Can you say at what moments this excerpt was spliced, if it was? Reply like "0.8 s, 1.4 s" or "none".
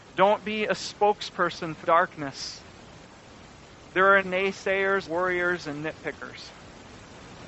1.8 s, 4.2 s, 5.0 s